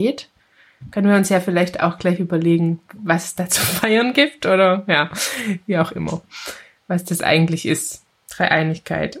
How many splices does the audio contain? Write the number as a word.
one